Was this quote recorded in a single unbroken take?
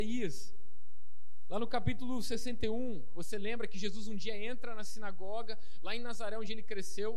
yes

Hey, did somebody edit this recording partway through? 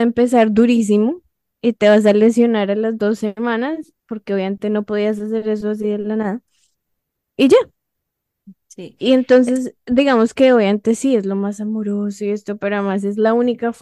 no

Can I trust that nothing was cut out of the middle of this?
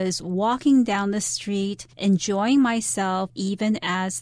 no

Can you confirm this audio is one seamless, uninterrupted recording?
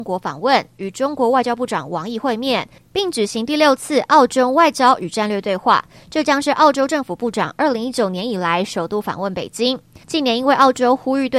no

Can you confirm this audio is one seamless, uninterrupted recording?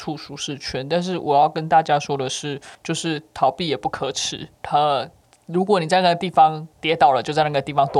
no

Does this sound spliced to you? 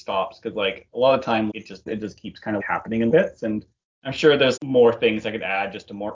yes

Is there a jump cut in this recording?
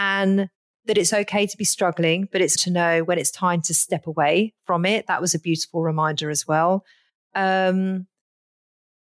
yes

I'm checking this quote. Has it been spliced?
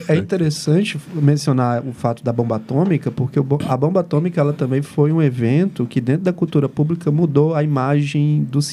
no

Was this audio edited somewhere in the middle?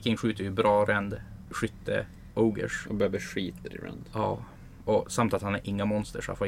no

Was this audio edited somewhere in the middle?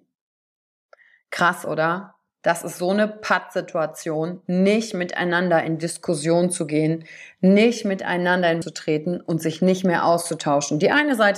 yes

